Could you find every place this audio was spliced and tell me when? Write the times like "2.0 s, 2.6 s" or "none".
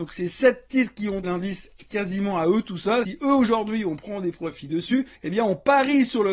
1.2 s, 5.1 s